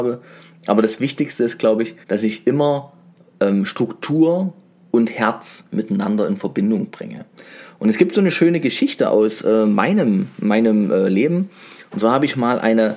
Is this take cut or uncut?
cut